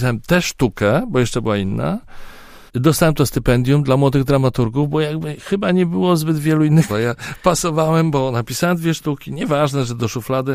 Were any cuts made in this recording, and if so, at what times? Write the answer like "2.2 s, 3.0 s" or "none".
2.7 s, 6.9 s